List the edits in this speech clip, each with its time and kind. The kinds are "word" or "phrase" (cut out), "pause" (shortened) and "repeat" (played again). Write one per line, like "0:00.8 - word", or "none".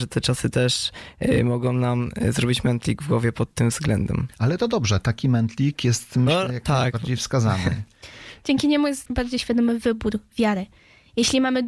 0:09.1 - word